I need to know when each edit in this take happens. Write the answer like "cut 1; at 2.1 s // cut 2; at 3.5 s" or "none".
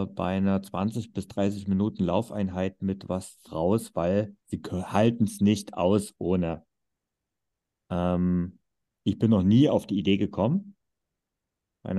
cut 1; at 3.5 s // cut 2; at 4.4 s